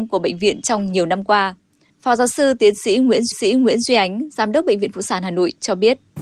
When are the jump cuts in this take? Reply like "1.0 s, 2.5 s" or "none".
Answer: 3.3 s